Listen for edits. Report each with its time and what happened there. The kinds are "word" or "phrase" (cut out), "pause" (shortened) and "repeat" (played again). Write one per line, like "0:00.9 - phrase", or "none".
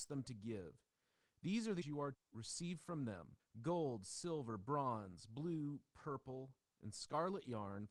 0:01.8 - word
0:02.1 - word
0:03.4 - pause

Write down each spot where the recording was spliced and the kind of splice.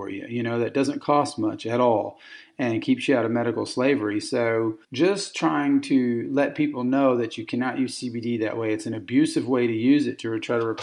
0:04.8 - pause

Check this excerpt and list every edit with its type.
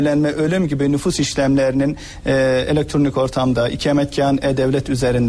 none

